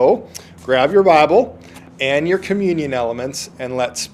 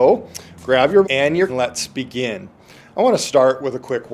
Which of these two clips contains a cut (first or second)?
second